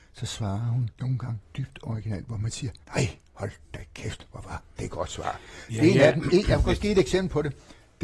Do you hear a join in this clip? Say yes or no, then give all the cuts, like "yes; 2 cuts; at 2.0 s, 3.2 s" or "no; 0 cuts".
yes; 3 cuts; at 0.9 s, 1.4 s, 2.8 s